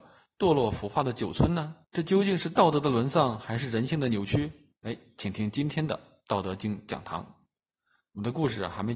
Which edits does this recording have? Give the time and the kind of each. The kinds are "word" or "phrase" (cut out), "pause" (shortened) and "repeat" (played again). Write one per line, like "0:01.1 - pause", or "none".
0:01.8 - pause
0:04.8 - pause